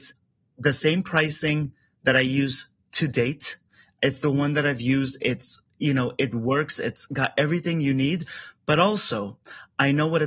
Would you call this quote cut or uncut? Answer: uncut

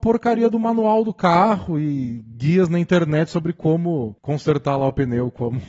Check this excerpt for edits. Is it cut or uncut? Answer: cut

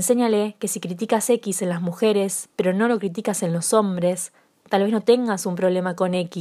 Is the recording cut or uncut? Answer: uncut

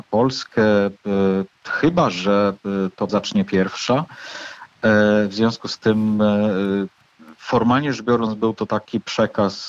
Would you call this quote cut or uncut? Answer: cut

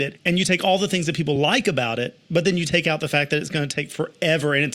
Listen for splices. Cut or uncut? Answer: uncut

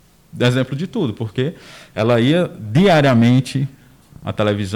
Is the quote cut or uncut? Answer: uncut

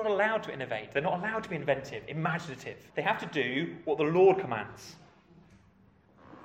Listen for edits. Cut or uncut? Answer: cut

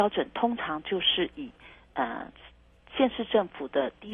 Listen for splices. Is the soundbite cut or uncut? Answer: uncut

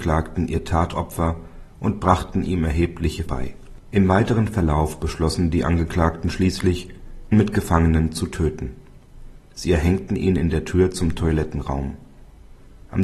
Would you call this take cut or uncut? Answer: cut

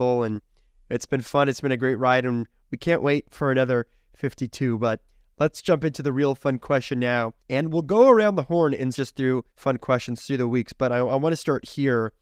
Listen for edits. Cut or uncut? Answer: cut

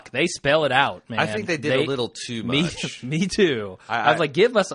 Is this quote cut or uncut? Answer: uncut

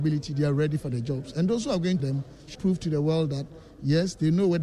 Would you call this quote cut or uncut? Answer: cut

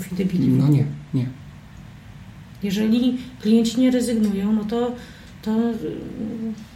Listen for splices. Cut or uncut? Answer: uncut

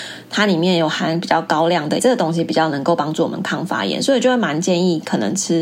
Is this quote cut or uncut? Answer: cut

